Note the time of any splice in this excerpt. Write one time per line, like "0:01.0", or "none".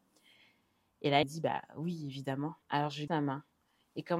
0:01.2
0:02.6
0:03.1